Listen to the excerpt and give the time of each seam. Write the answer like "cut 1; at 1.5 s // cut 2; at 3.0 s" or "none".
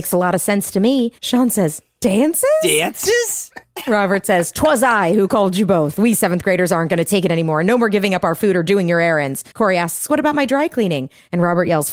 cut 1; at 1.2 s // cut 2; at 9.5 s